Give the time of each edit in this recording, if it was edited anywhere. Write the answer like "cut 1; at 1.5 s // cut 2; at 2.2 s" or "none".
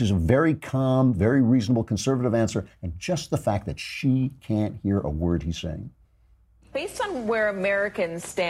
none

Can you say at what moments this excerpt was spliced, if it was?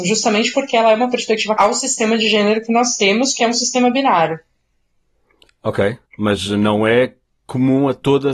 cut 1; at 1.6 s // cut 2; at 6.1 s // cut 3; at 7.2 s

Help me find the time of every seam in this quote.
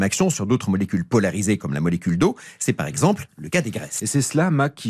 none

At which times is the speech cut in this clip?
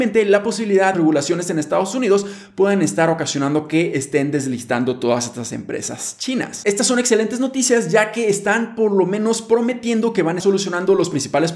cut 1; at 0.9 s // cut 2; at 10.4 s

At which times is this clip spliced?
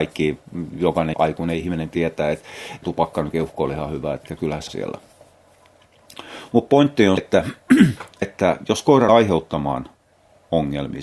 cut 1; at 1.1 s // cut 2; at 2.8 s // cut 3; at 3.3 s // cut 4; at 4.2 s // cut 5; at 4.7 s // cut 6; at 7.2 s // cut 7; at 8.2 s // cut 8; at 9.1 s

